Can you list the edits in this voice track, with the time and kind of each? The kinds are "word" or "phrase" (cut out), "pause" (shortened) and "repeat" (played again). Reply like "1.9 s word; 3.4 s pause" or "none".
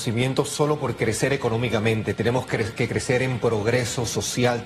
none

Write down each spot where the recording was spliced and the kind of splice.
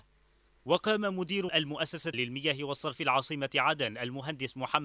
1.5 s word; 2.1 s word; 3.0 s word

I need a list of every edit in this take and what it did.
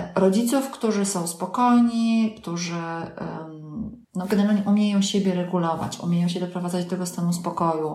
4.0 s pause

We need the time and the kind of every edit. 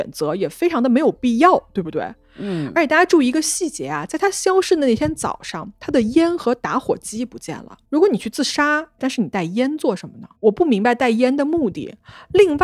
7.8 s pause; 9.0 s phrase; 10.4 s pause

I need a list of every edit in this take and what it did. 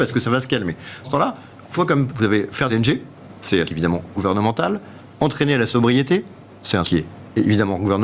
1.0 s word; 1.7 s word; 2.1 s word; 2.7 s word; 3.7 s word; 4.1 s word; 6.8 s word

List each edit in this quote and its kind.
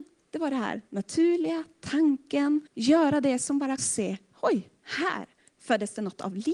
2.7 s pause; 3.8 s phrase

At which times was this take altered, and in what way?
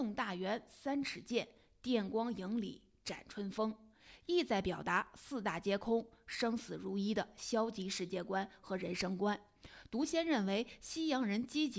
none

